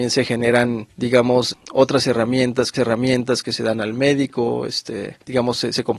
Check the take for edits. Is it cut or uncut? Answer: cut